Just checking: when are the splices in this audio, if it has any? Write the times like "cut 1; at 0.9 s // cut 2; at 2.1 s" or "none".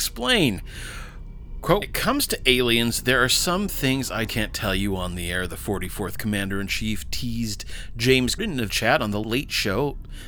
cut 1; at 1.8 s // cut 2; at 4.3 s // cut 3; at 8.4 s // cut 4; at 8.7 s // cut 5; at 9.2 s

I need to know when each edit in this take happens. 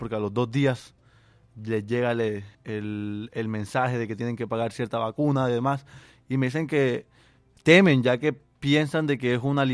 cut 1; at 2.5 s

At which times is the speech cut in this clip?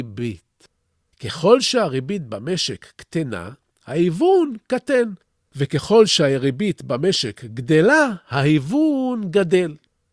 none

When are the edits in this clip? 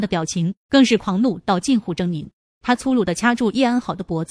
cut 1; at 2.4 s

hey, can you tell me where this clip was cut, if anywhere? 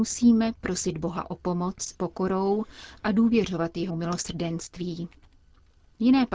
cut 1; at 1.9 s // cut 2; at 3.9 s

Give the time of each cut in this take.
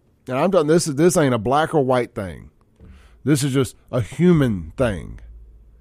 none

